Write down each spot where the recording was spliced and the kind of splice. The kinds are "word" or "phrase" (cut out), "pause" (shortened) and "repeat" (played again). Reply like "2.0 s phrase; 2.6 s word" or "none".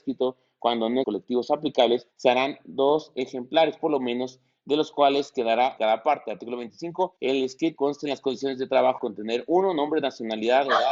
1.0 s phrase; 2.1 s pause; 5.8 s phrase; 7.2 s pause; 7.8 s phrase; 9.0 s word